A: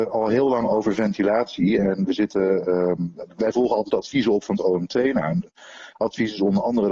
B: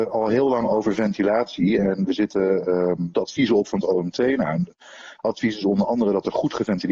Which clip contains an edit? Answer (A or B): B